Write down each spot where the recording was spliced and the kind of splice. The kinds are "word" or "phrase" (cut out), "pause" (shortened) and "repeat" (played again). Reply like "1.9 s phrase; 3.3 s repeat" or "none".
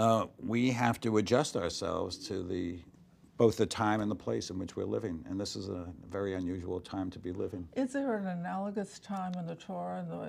2.9 s pause